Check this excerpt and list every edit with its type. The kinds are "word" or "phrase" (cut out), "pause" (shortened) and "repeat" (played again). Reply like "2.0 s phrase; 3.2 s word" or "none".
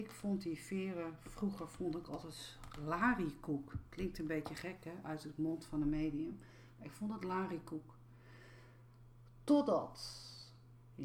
none